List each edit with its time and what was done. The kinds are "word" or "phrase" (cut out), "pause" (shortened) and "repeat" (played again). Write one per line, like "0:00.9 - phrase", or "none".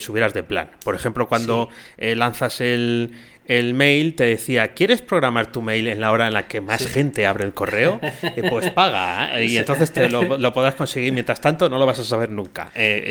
none